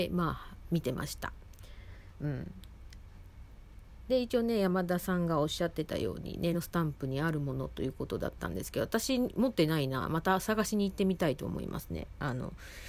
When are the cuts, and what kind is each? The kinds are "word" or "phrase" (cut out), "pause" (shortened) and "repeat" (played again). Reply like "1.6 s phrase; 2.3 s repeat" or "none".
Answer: 6.5 s word